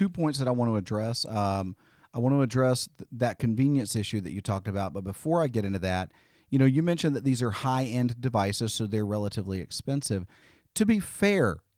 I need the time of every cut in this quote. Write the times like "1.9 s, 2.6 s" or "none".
none